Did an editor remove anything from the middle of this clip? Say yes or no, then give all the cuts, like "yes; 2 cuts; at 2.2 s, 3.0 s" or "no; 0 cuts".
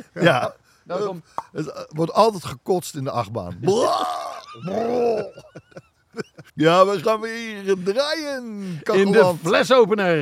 yes; 1 cut; at 6.5 s